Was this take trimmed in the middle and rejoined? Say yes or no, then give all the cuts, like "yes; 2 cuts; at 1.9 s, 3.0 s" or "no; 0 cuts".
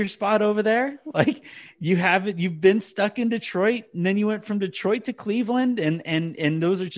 no; 0 cuts